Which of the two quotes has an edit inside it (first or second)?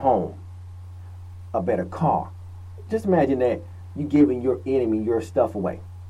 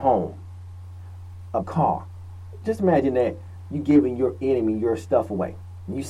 second